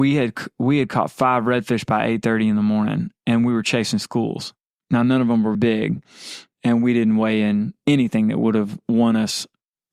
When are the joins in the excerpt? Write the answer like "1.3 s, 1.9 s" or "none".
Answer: 5.5 s